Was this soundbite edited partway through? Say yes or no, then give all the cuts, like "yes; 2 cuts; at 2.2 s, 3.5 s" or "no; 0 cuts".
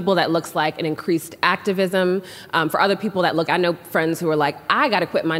yes; 1 cut; at 3.5 s